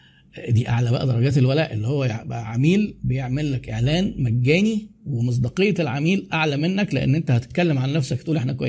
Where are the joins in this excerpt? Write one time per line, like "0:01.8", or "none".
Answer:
none